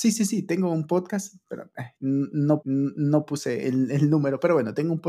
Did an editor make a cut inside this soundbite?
yes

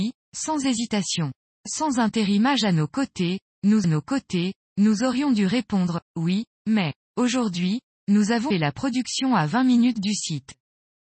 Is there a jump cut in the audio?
yes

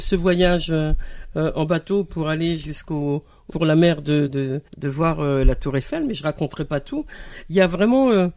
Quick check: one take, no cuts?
no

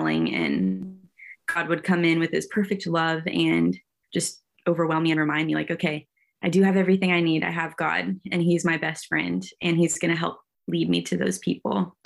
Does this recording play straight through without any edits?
yes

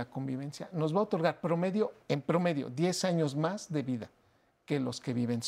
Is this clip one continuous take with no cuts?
no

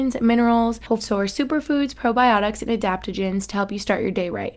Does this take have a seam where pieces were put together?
yes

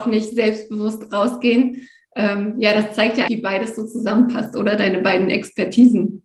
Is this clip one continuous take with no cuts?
no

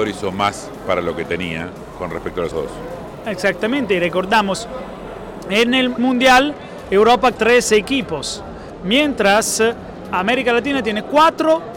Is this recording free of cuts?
no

